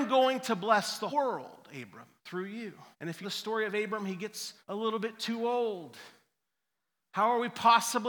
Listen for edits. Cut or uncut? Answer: cut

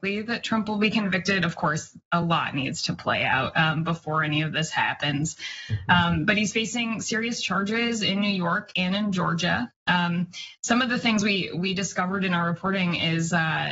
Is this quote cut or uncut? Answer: uncut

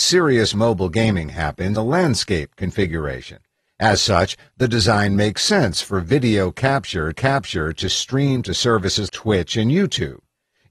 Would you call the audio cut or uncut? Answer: cut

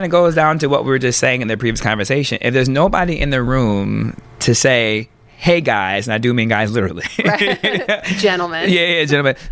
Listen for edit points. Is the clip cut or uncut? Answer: uncut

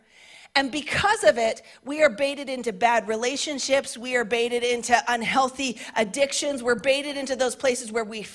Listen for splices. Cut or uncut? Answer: uncut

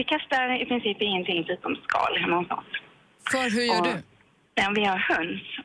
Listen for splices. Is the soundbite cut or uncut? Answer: uncut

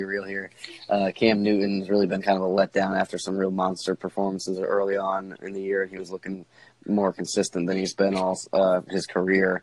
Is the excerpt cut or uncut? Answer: uncut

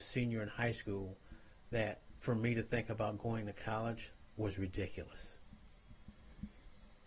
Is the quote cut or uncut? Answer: uncut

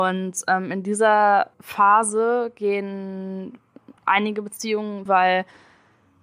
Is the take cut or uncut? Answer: cut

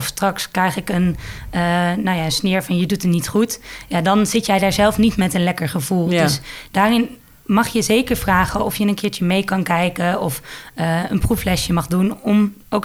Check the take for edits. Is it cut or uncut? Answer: uncut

